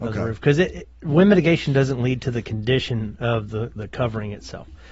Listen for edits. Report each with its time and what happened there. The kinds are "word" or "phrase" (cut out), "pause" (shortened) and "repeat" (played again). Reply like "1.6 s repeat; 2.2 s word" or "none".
none